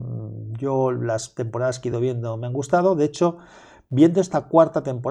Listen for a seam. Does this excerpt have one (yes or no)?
no